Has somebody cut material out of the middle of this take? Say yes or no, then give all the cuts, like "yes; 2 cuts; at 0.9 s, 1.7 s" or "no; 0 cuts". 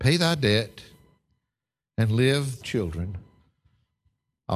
yes; 1 cut; at 2.6 s